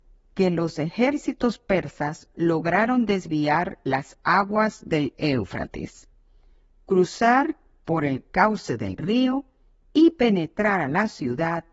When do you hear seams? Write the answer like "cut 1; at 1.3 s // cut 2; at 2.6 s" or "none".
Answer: none